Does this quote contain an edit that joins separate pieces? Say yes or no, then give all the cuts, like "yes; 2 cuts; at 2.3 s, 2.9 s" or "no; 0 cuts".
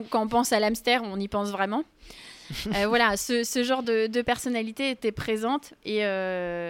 no; 0 cuts